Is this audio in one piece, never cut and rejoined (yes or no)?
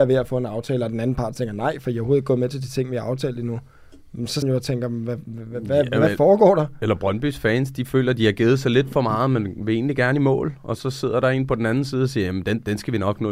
no